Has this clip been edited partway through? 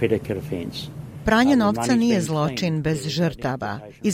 no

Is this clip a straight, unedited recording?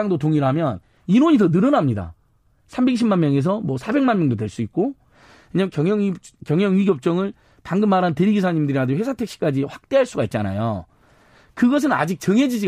yes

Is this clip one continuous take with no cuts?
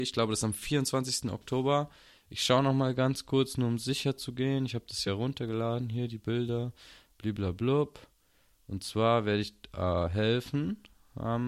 yes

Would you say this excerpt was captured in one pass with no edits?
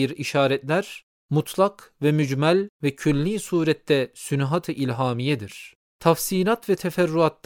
no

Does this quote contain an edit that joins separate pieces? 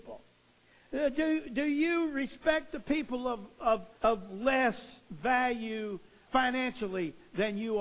yes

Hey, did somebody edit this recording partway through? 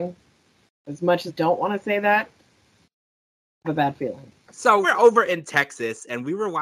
yes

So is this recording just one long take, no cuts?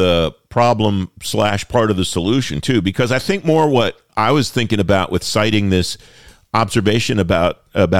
yes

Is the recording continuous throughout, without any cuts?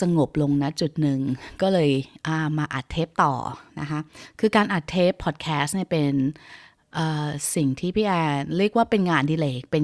yes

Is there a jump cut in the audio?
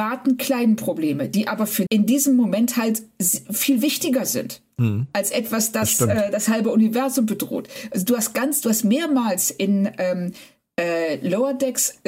yes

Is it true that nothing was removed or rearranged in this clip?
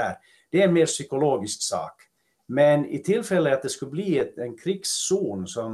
yes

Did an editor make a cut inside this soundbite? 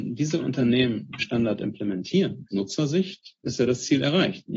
yes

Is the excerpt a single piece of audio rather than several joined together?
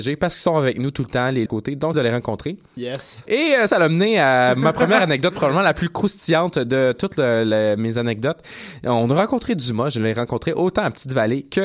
no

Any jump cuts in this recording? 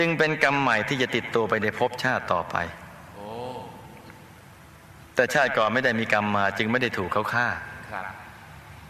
yes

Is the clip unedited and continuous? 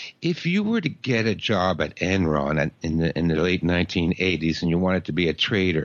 yes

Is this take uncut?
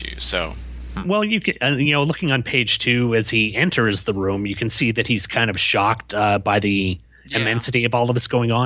yes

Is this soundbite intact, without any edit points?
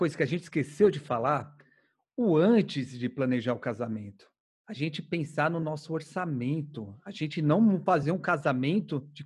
yes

